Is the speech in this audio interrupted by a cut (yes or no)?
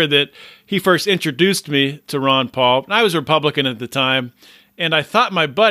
no